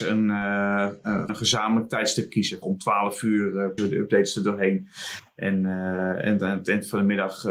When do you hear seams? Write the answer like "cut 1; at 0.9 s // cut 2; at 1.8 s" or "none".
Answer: cut 1; at 1.3 s // cut 2; at 2.6 s // cut 3; at 3.8 s